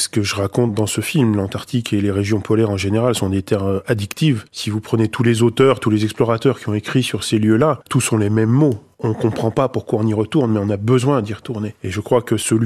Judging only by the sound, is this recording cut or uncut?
uncut